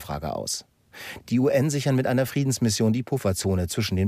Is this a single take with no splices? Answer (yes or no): yes